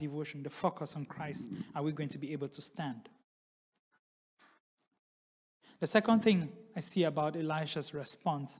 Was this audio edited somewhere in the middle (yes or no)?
no